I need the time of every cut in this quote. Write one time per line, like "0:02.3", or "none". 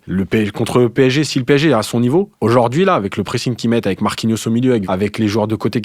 0:04.8